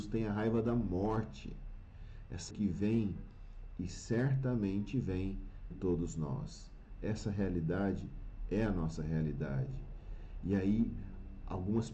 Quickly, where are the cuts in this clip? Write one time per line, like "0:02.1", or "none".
0:02.5
0:05.7